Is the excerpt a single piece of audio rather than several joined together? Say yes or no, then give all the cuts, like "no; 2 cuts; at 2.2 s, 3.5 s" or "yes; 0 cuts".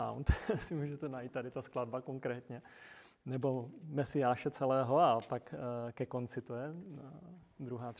yes; 0 cuts